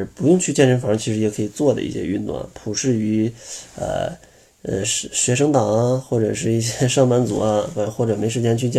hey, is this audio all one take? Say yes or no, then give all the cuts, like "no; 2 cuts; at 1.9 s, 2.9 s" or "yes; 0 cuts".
yes; 0 cuts